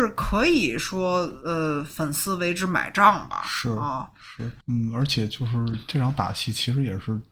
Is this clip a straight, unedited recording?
no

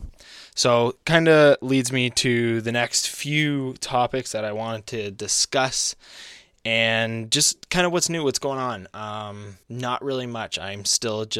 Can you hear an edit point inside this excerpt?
yes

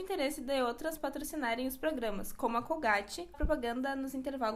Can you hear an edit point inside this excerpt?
yes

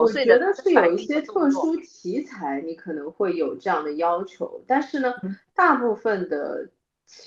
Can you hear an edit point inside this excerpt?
no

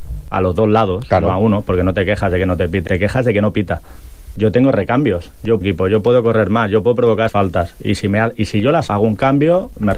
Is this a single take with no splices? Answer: no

